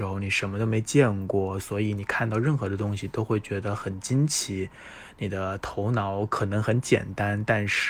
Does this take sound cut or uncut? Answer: uncut